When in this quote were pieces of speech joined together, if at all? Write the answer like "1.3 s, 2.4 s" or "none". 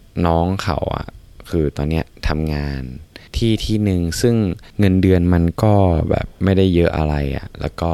3.3 s, 4.7 s